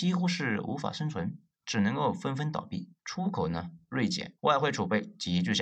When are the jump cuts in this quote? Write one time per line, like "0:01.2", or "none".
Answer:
0:03.0
0:04.4